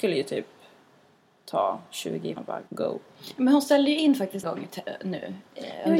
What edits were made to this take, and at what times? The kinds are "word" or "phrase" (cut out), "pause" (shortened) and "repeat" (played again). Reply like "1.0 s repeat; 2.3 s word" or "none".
2.4 s word; 2.7 s pause; 4.4 s word